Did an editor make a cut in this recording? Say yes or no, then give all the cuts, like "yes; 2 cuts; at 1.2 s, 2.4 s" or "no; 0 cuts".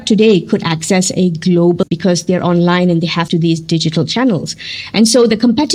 yes; 2 cuts; at 1.8 s, 3.3 s